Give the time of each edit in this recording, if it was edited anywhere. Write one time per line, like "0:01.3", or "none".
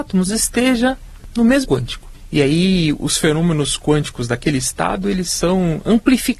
0:01.6